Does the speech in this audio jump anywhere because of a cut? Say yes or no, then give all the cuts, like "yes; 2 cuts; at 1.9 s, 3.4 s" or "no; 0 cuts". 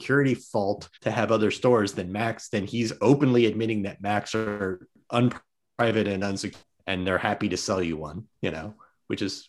yes; 2 cuts; at 0.9 s, 8.3 s